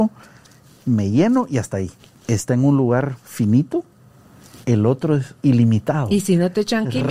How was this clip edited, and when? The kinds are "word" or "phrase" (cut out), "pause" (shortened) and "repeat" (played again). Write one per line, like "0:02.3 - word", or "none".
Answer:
0:02.0 - pause
0:04.6 - pause
0:05.4 - pause